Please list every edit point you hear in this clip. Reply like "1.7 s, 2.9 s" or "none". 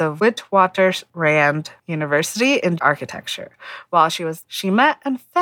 2.8 s, 4.4 s